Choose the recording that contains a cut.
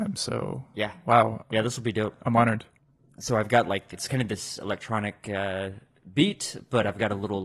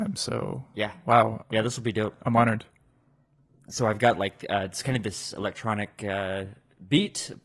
first; 2 cuts; at 2.8 s, 3.9 s

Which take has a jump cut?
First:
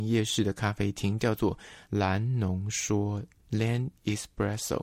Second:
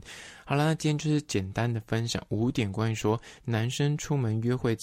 first; 1 cut; at 1.8 s

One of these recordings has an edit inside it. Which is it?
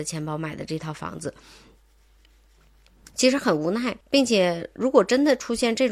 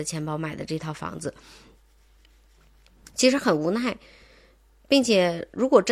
first; 1 cut; at 4.0 s

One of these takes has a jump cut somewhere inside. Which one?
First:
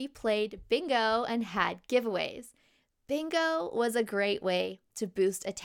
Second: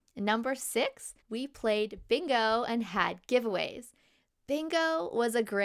second; 1 cut; at 1.2 s

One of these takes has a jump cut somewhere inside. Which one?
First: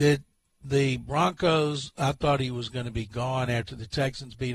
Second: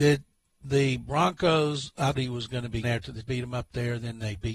second; 3 cuts; at 2.2 s, 2.8 s, 3.2 s

